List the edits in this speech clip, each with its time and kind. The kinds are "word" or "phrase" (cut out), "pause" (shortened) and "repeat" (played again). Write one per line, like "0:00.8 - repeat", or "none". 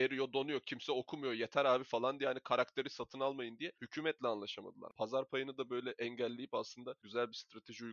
none